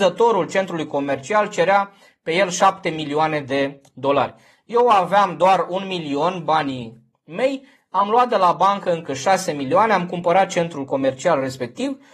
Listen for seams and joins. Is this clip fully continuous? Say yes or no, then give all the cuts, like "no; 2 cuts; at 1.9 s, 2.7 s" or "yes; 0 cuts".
yes; 0 cuts